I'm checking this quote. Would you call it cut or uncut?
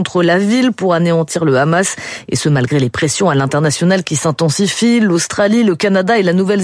uncut